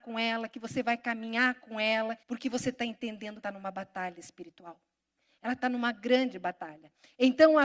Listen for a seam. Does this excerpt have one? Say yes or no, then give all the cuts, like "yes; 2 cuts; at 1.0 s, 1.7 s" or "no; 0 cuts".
yes; 2 cuts; at 2.2 s, 3.4 s